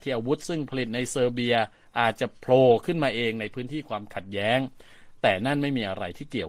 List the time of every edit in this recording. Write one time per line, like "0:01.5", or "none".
none